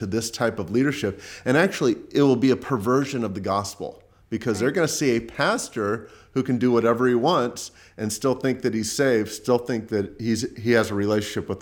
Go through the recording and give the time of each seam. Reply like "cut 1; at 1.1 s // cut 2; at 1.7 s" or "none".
none